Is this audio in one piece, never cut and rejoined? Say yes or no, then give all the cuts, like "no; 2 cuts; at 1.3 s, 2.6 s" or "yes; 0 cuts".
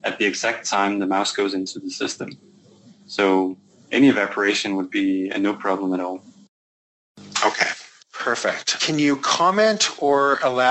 yes; 0 cuts